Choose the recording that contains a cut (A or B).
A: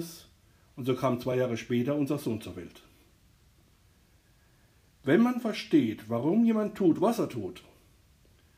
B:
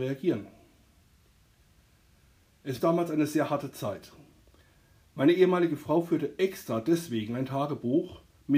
B